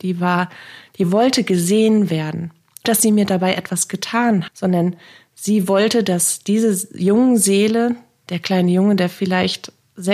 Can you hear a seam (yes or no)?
yes